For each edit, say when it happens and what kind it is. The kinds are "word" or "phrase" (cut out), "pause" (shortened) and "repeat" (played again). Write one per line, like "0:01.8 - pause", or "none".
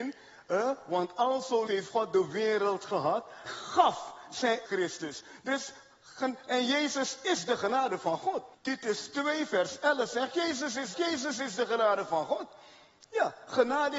0:01.7 - word
0:03.5 - phrase
0:04.7 - phrase
0:08.5 - pause
0:10.9 - repeat

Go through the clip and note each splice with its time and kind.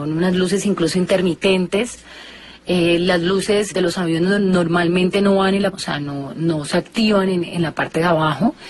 0:03.7 - word
0:05.7 - phrase
0:07.5 - word

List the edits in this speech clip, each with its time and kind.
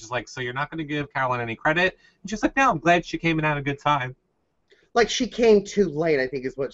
none

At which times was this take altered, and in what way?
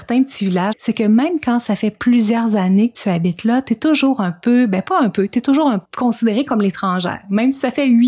0:05.9 - pause

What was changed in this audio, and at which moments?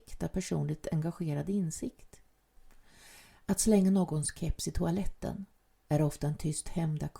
none

